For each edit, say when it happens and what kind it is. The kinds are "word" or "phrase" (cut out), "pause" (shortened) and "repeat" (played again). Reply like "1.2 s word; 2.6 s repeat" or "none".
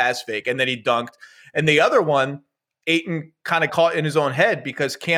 3.7 s word